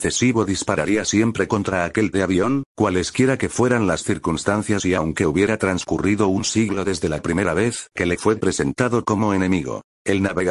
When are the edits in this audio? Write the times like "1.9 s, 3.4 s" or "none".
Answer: 2.1 s